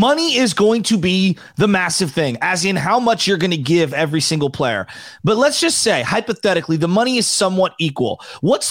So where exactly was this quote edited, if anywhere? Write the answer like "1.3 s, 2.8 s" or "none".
none